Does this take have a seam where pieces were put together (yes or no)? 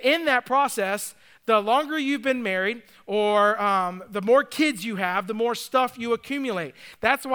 no